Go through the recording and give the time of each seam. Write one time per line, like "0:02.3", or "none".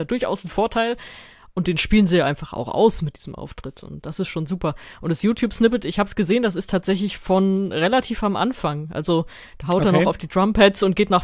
none